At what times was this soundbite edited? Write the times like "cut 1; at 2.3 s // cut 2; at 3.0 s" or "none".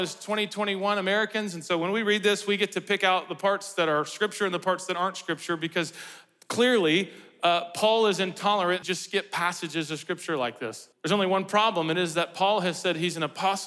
cut 1; at 8.8 s // cut 2; at 10.9 s